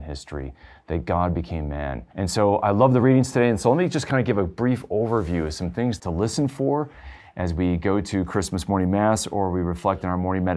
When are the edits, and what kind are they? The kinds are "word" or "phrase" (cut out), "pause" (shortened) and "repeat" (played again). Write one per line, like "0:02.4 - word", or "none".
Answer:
0:02.1 - pause
0:06.0 - word